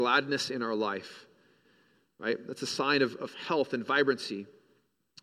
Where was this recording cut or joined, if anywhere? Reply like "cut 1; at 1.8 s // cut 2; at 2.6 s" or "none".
none